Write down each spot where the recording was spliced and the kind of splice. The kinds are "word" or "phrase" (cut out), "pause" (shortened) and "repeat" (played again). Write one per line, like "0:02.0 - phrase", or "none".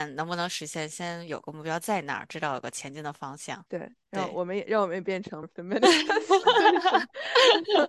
0:03.7 - pause
0:05.4 - word